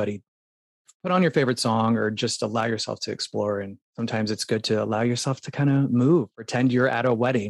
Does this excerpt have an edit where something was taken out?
yes; 1 cut; at 3.8 s

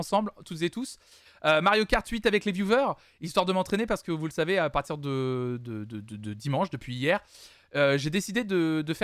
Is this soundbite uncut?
yes; 0 cuts

